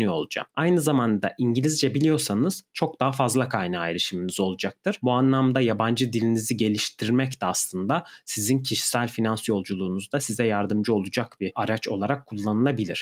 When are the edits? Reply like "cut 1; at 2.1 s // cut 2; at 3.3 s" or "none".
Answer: none